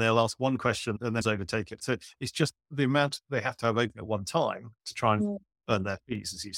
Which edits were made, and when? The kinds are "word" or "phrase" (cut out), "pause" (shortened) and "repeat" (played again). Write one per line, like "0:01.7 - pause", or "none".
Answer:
0:01.2 - word
0:02.6 - pause